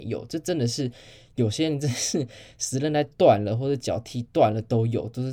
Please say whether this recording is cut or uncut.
uncut